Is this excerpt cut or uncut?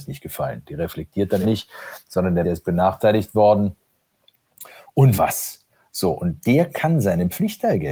cut